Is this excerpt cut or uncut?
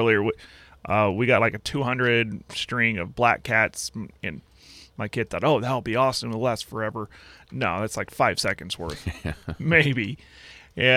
uncut